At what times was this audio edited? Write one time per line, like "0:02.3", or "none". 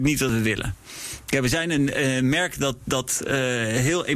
none